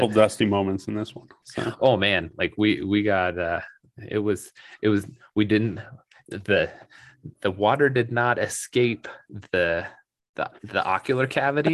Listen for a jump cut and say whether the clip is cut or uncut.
uncut